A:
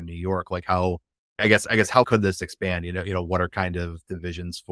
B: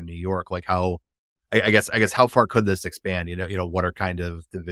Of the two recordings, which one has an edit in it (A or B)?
A